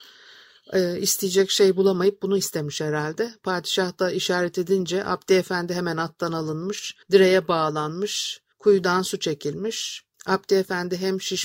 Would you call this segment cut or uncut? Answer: cut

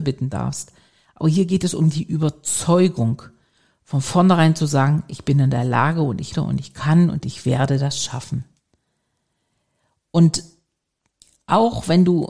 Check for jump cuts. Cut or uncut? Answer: cut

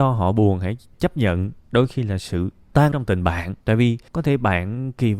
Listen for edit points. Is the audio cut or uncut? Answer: cut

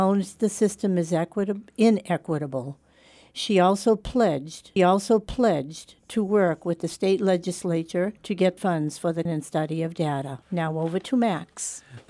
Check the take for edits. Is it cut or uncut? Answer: cut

